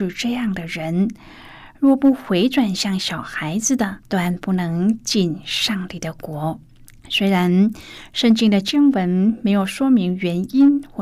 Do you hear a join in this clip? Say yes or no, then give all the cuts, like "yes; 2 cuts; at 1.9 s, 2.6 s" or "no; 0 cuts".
yes; 2 cuts; at 4.0 s, 6.9 s